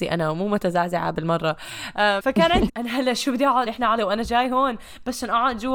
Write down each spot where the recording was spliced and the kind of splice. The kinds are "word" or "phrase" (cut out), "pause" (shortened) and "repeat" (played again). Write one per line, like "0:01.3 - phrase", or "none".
0:02.2 - word
0:02.7 - word
0:03.7 - word
0:04.0 - word